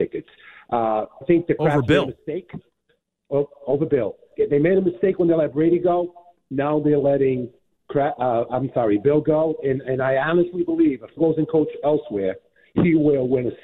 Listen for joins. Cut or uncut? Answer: cut